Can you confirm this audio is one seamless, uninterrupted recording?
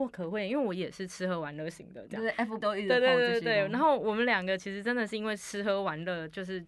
no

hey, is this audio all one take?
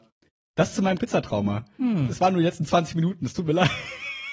no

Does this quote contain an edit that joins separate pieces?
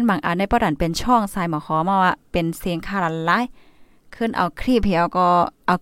no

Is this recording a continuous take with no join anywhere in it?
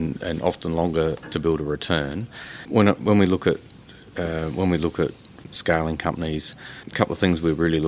yes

